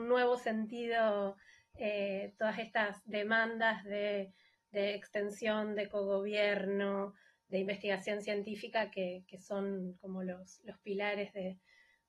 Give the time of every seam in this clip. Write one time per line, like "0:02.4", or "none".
none

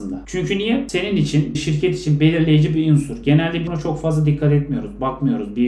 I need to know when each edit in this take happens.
0:01.5
0:03.7

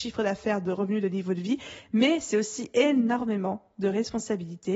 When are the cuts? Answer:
none

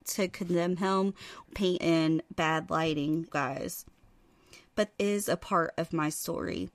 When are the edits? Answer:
0:01.5
0:01.8
0:03.3
0:04.9

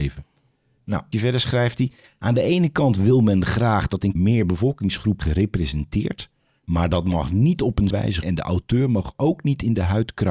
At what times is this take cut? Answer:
0:01.1
0:04.2
0:05.2
0:07.9
0:08.2

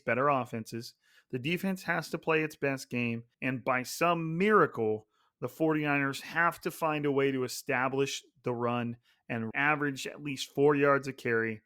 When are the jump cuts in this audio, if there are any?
0:03.3
0:09.5

